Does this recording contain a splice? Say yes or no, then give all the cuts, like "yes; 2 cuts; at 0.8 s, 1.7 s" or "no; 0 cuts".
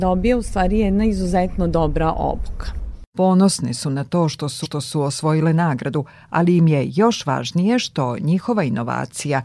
yes; 1 cut; at 4.6 s